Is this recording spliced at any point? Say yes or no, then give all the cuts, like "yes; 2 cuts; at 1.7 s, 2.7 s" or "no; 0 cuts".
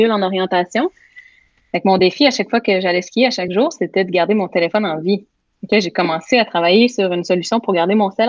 no; 0 cuts